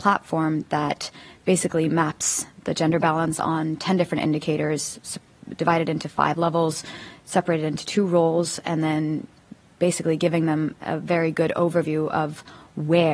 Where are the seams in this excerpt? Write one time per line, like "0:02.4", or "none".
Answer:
none